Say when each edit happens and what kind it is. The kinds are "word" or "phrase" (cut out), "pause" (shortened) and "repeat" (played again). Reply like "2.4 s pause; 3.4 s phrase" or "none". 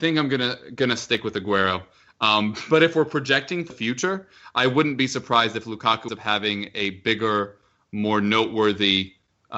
3.7 s word; 6.1 s word